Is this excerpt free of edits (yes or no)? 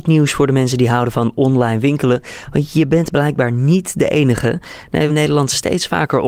no